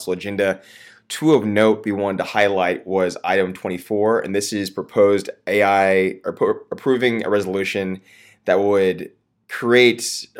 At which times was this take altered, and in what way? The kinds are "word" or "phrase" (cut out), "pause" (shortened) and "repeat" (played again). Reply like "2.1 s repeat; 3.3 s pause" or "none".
none